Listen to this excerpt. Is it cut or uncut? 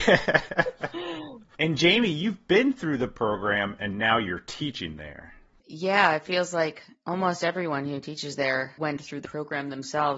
uncut